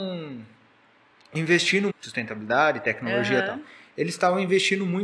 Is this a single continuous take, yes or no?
no